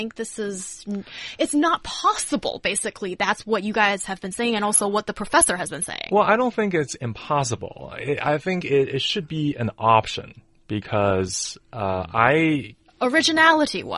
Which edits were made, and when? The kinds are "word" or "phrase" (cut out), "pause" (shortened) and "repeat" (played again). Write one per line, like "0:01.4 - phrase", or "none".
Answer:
none